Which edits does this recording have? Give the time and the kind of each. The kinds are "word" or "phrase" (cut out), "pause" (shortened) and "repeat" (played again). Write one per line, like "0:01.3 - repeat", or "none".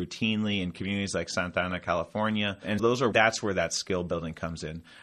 0:02.8 - word
0:03.1 - phrase